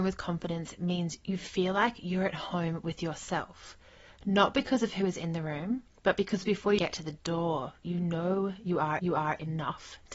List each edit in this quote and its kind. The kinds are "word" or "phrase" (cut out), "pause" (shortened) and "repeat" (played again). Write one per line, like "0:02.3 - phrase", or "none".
0:06.0 - pause
0:06.8 - word
0:09.0 - repeat